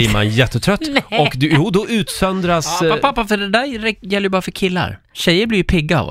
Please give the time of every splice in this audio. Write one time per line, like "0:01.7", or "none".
none